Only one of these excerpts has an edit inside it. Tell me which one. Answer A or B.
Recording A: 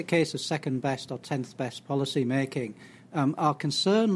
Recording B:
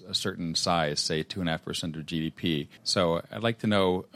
B